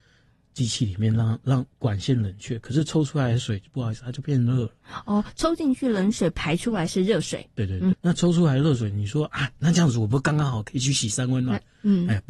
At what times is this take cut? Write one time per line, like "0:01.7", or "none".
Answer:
0:01.7
0:07.9